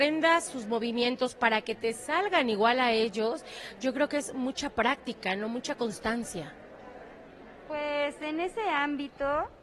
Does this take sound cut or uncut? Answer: uncut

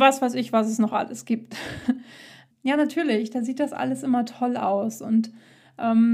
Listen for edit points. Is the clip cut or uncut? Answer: cut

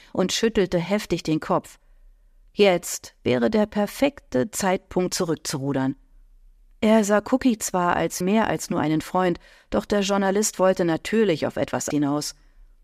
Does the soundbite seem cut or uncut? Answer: cut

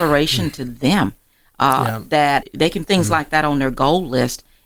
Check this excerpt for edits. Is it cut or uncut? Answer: cut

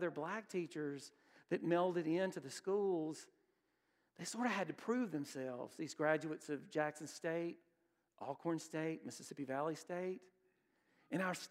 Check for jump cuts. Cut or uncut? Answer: uncut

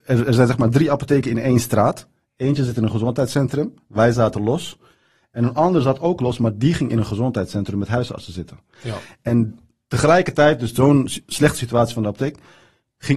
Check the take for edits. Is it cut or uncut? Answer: uncut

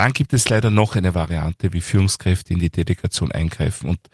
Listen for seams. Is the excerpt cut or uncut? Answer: uncut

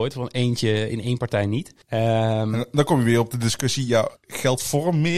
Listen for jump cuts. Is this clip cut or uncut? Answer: cut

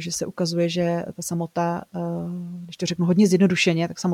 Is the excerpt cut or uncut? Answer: uncut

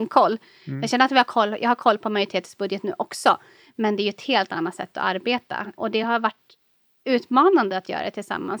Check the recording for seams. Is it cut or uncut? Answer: uncut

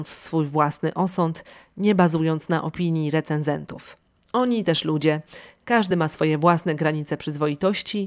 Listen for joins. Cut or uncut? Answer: uncut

